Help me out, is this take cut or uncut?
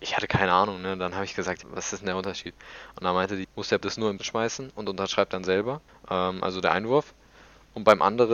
cut